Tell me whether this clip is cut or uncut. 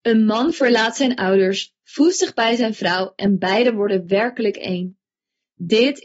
uncut